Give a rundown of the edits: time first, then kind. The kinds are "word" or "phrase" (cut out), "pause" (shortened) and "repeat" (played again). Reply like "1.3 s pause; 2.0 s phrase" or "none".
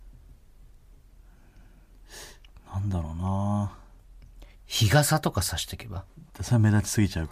4.5 s pause